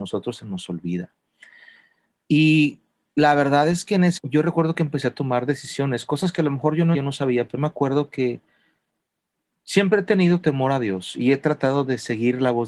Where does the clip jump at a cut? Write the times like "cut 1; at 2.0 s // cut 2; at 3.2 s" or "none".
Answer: cut 1; at 4.2 s // cut 2; at 6.9 s // cut 3; at 7.6 s

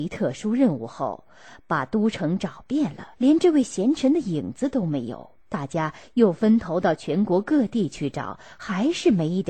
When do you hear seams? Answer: cut 1; at 3.1 s // cut 2; at 5.4 s

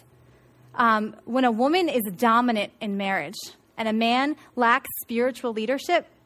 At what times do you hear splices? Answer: none

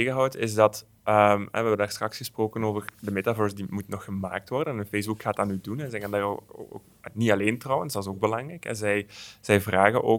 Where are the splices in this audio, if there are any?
none

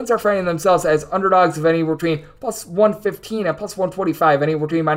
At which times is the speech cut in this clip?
none

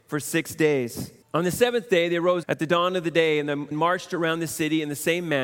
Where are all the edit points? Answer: cut 1; at 1.2 s // cut 2; at 2.4 s // cut 3; at 3.7 s

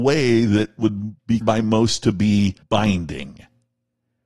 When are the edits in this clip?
cut 1; at 1.4 s // cut 2; at 2.6 s

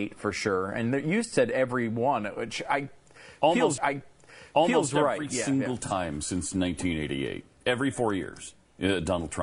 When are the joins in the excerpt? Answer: cut 1; at 3.8 s

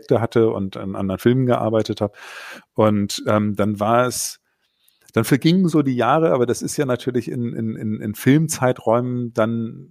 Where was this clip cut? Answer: none

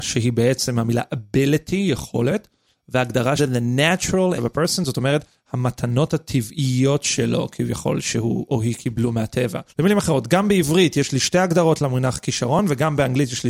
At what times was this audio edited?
cut 1; at 3.4 s // cut 2; at 4.4 s // cut 3; at 9.7 s

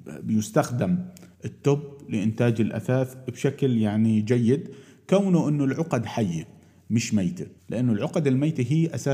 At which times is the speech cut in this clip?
cut 1; at 1.3 s // cut 2; at 7.6 s

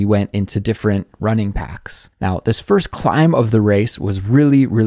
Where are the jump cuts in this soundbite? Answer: cut 1; at 2.1 s

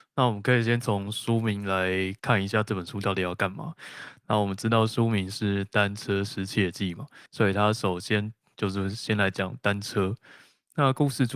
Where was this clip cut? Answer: cut 1; at 2.2 s // cut 2; at 7.3 s

